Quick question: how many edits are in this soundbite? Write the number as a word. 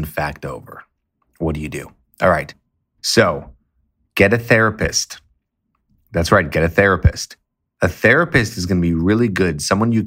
zero